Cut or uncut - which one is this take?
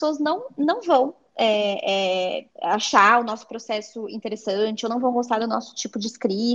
cut